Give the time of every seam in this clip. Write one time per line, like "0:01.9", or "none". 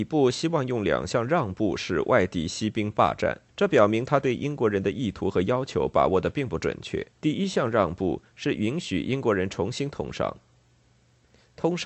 0:03.5
0:07.1